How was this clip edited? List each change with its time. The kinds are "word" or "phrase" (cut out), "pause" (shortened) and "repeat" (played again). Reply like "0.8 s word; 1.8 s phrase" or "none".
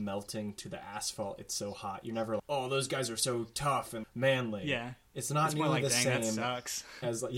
2.4 s word; 4.0 s word